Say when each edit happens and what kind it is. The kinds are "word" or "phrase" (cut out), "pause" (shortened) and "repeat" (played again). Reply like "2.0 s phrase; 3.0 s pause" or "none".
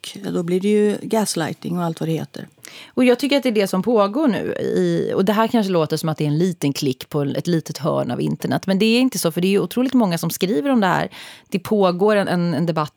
none